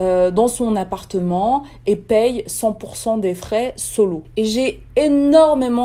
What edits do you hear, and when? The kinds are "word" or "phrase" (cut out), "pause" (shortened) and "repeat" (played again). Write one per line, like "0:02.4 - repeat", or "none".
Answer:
none